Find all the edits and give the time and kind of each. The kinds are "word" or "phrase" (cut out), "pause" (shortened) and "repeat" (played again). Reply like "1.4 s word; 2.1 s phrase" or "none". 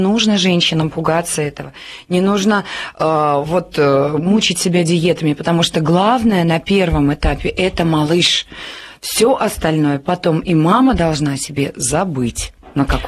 none